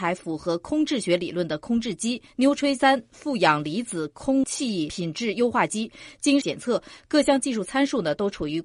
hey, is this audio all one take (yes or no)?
yes